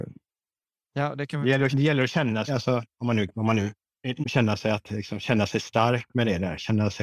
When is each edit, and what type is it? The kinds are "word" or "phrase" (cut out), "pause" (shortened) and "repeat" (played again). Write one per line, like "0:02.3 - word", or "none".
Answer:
0:01.7 - word
0:02.5 - word
0:04.2 - word